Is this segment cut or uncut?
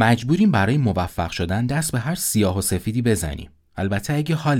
uncut